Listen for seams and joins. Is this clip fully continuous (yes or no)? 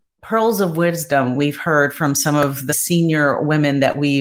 no